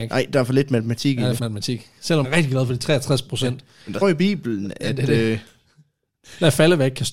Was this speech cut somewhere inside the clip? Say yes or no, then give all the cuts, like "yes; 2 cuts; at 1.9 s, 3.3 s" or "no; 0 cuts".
yes; 3 cuts; at 1.4 s, 2.2 s, 4.0 s